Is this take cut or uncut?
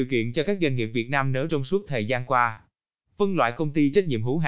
cut